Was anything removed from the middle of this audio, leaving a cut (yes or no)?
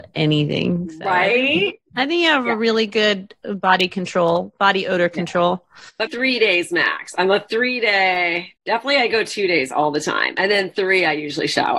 yes